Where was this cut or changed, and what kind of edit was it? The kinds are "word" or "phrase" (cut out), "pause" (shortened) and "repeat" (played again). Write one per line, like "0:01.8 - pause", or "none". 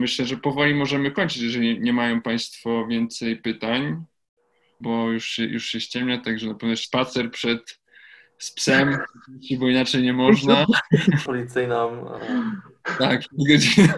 0:04.8 - word
0:06.8 - word
0:11.3 - word